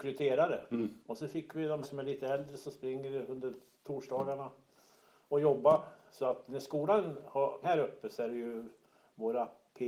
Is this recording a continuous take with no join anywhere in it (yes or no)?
no